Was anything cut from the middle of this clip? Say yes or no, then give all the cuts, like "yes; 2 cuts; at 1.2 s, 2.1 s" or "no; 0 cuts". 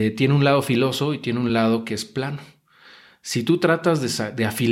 no; 0 cuts